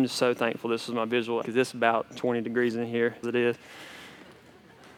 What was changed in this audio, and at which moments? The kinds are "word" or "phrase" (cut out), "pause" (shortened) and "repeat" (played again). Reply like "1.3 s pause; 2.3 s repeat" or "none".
1.4 s word; 3.2 s word